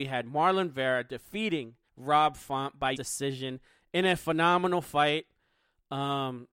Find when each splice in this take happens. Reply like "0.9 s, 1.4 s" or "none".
1.9 s, 2.9 s